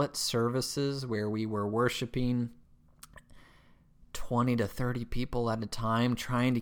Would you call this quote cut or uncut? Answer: uncut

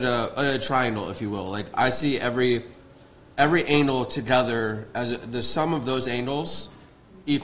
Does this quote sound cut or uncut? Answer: uncut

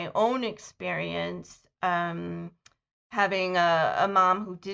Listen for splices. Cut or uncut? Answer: uncut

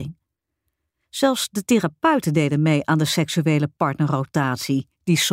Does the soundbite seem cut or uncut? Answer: uncut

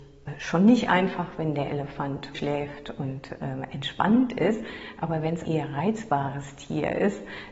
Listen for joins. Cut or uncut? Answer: cut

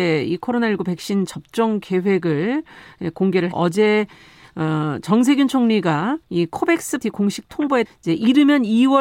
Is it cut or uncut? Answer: cut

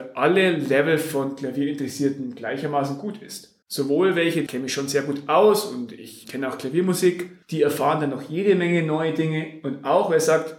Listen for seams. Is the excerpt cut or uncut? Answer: cut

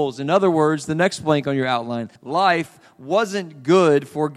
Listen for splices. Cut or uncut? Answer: cut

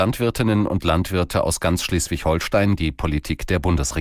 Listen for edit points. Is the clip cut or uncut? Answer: cut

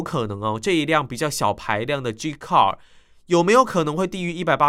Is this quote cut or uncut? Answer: uncut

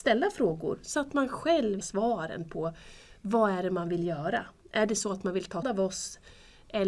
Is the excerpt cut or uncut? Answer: cut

